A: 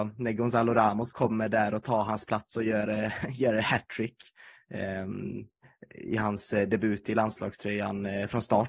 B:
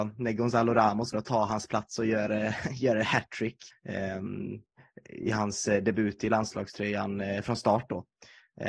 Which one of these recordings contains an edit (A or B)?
B